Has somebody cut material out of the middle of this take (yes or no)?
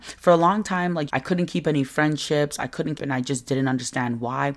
yes